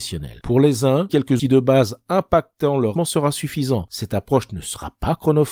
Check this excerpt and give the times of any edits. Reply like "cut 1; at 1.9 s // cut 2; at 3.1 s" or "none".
cut 1; at 1.1 s // cut 2; at 1.4 s // cut 3; at 3.0 s